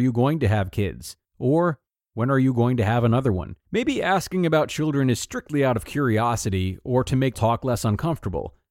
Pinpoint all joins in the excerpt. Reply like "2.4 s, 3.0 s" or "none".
1.2 s, 3.6 s, 7.3 s